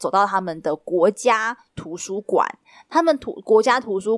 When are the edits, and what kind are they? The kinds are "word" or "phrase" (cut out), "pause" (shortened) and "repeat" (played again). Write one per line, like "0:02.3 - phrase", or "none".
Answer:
none